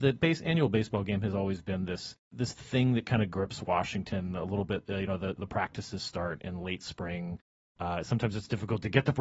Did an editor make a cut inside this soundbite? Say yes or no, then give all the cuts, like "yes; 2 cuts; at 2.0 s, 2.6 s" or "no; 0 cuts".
no; 0 cuts